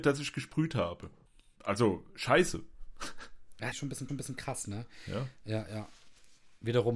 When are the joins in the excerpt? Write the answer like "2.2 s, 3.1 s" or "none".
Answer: 1.3 s, 3.7 s, 4.1 s